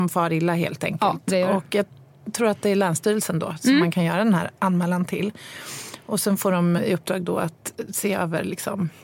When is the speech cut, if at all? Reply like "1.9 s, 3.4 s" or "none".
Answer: 6.8 s